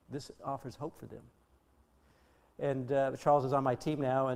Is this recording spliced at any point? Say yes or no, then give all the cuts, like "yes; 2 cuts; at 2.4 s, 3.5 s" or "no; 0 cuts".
no; 0 cuts